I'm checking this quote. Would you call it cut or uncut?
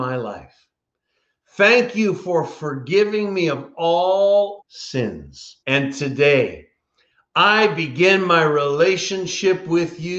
cut